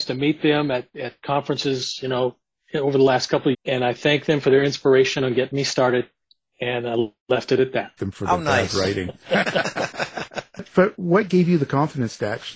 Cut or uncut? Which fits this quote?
cut